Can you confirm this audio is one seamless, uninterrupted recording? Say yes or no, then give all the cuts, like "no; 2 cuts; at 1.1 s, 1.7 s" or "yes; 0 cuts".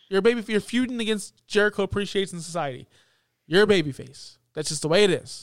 yes; 0 cuts